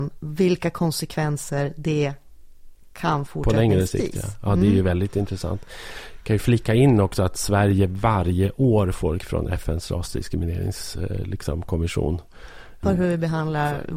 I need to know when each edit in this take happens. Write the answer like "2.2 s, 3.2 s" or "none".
3.3 s, 9.2 s, 12.8 s